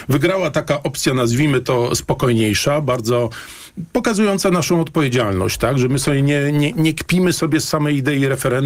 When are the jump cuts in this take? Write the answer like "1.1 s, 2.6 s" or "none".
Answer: none